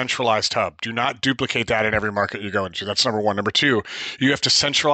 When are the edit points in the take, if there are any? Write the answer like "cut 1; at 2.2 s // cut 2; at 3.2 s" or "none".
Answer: none